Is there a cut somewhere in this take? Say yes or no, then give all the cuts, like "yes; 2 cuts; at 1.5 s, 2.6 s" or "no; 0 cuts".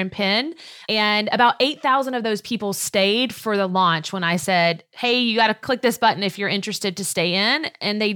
no; 0 cuts